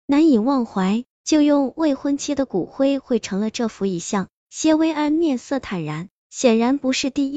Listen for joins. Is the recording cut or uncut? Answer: cut